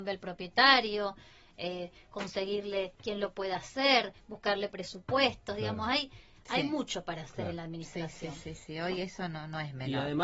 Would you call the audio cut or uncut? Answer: uncut